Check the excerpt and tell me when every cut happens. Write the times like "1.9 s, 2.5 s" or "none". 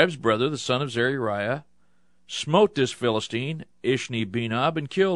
none